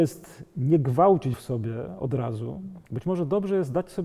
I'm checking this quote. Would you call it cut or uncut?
cut